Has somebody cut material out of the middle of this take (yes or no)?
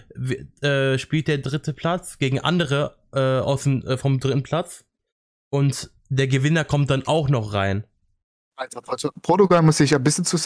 no